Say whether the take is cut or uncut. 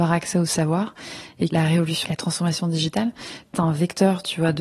cut